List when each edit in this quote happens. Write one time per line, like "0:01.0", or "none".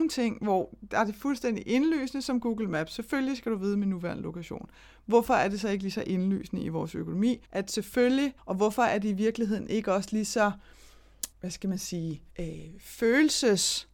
0:07.4
0:08.4
0:11.3
0:12.3